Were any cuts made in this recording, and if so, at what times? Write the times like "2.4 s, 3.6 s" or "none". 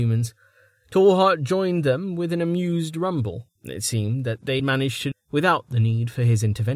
3.6 s, 4.6 s, 5.1 s